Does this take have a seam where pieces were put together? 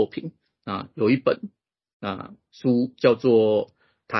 no; 0 cuts

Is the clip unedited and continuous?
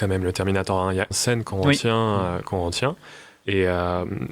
no; 1 cut; at 1.1 s

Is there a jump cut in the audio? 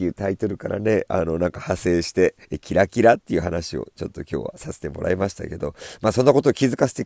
yes; 1 cut; at 2.4 s

